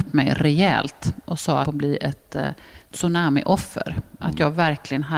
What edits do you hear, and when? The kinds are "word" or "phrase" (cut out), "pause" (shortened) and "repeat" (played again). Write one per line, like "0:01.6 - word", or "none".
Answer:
0:01.6 - phrase